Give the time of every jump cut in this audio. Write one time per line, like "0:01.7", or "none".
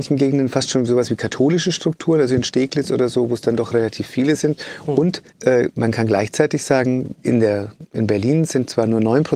0:05.3
0:07.2